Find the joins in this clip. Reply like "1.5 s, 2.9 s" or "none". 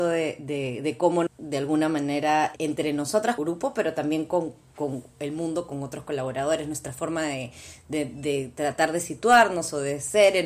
1.3 s, 2.6 s, 3.4 s